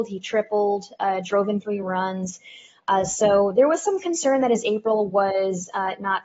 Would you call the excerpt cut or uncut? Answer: uncut